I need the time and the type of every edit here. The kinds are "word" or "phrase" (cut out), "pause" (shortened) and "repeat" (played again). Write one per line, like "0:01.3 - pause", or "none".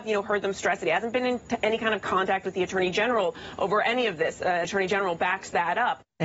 0:04.6 - word